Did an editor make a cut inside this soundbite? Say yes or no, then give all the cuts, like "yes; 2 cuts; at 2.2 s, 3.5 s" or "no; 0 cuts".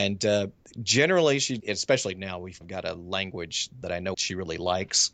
yes; 4 cuts; at 1.6 s, 2.6 s, 3.8 s, 4.1 s